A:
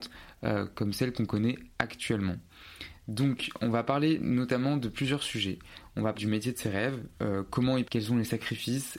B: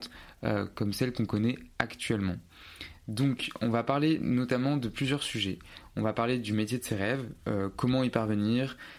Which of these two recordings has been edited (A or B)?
A